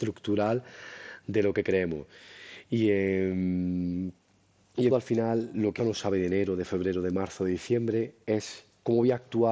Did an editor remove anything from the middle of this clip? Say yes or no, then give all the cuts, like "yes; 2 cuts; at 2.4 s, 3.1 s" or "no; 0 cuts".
yes; 3 cuts; at 4.9 s, 5.8 s, 8.2 s